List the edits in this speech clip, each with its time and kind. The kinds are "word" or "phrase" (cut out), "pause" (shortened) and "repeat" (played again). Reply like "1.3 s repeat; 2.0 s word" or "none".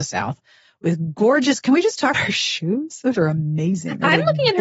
2.1 s word; 3.2 s word